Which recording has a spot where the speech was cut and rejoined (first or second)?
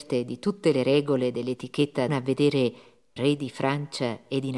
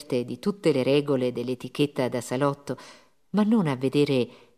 first